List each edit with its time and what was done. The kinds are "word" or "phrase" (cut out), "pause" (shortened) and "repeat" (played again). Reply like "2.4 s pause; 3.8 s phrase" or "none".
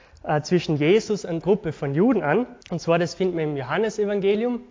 1.4 s word; 2.6 s pause

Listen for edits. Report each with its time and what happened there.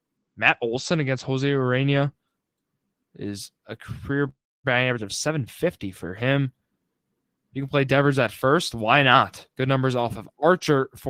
3.6 s pause; 9.5 s pause

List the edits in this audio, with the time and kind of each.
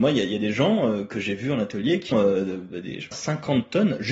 2.1 s word; 3.1 s word

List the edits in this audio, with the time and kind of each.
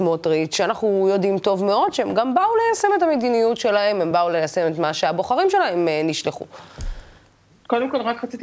none

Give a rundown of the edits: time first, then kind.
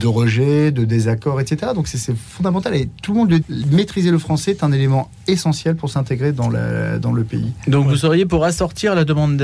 3.4 s word

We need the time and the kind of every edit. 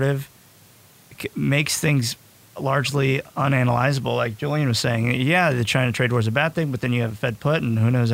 none

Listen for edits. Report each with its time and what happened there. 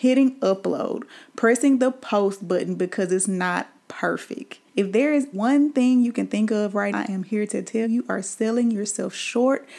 4.7 s pause; 5.3 s word; 6.9 s word; 7.8 s word

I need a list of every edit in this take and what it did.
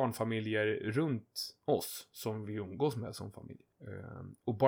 3.7 s pause

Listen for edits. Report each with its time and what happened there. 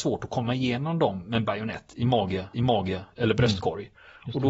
2.5 s repeat

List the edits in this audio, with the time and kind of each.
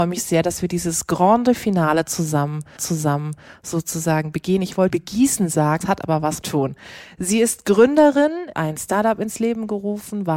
2.8 s repeat; 4.9 s word; 5.8 s word; 6.4 s phrase; 8.5 s phrase

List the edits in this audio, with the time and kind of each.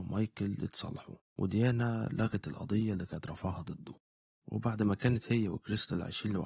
none

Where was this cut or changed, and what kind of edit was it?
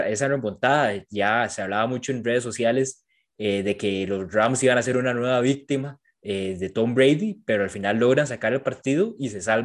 none

